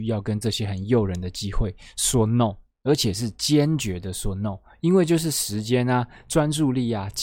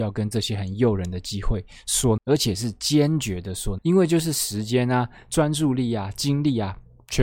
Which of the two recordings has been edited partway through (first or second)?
second